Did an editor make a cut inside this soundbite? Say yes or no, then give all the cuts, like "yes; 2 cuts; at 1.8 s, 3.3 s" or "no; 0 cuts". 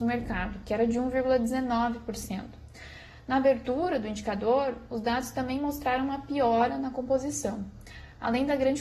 no; 0 cuts